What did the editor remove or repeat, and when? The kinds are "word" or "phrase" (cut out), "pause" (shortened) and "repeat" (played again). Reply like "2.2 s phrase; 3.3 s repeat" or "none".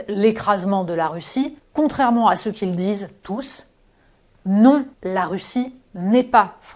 1.6 s pause; 4.9 s pause